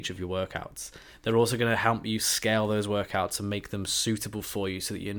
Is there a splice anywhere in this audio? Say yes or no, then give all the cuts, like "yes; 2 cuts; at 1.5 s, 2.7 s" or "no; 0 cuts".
no; 0 cuts